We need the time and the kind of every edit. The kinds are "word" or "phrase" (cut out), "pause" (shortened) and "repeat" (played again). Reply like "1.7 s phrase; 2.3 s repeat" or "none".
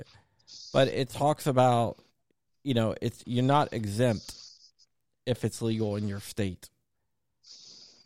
2.3 s pause